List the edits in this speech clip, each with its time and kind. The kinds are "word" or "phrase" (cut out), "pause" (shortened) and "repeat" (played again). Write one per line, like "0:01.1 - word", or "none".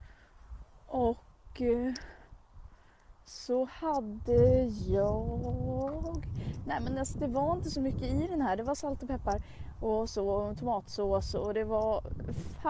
none

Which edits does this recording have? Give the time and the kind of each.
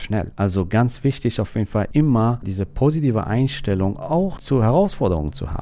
none

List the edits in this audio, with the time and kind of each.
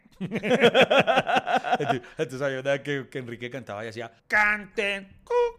0:04.2 - pause

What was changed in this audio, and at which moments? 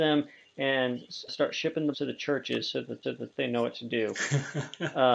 0:01.3 - word
0:01.9 - word
0:03.0 - repeat

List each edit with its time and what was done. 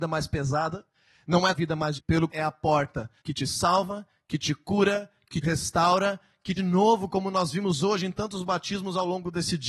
0:01.5 - phrase
0:02.0 - word
0:02.3 - phrase
0:03.2 - pause
0:05.4 - word
0:06.6 - phrase

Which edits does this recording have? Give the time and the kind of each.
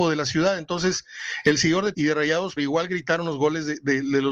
0:01.9 - word
0:02.6 - word

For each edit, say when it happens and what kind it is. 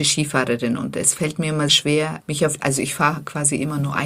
0:01.7 - word
0:02.2 - word
0:02.6 - word

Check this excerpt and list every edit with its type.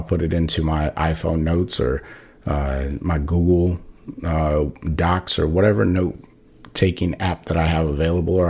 none

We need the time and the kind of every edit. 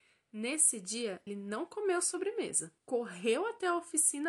0:01.3 - word
0:02.8 - pause

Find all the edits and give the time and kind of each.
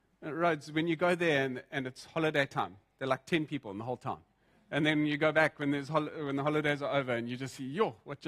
none

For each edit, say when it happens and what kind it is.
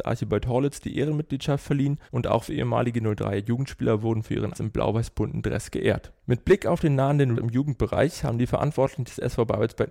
0:02.1 - pause
0:02.5 - word
0:04.5 - word
0:06.2 - pause
0:07.3 - word

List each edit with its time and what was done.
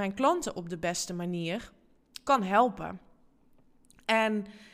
none

